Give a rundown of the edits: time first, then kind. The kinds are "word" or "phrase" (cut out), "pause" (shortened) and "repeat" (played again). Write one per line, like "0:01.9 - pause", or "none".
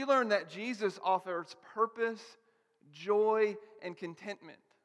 none